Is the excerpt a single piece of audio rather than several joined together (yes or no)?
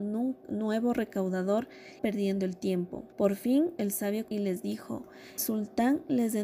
no